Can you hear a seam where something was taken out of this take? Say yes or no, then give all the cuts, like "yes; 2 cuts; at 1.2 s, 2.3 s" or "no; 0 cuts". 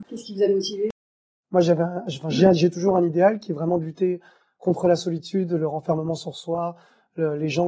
no; 0 cuts